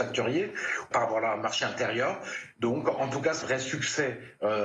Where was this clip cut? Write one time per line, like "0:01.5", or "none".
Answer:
0:00.9
0:03.4